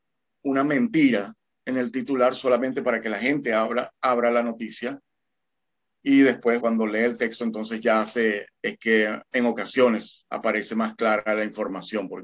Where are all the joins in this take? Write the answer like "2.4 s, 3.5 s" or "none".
6.6 s, 8.6 s, 9.2 s